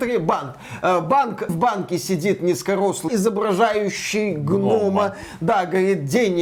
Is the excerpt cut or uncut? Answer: cut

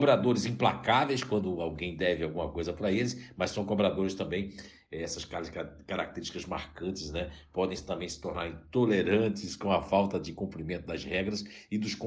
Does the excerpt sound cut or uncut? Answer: uncut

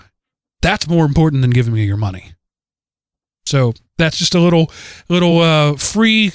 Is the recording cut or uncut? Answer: uncut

